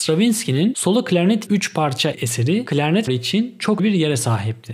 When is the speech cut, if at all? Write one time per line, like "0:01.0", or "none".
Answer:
0:01.5
0:02.1
0:03.1
0:03.8